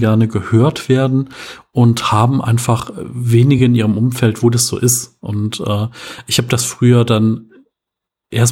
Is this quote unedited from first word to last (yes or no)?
yes